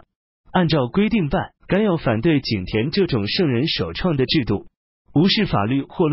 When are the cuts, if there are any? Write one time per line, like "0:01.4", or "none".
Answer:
0:01.6

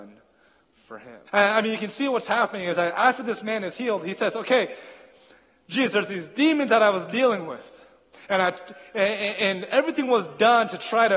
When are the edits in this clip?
0:01.3

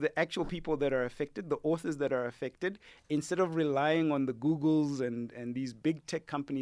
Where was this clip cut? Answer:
none

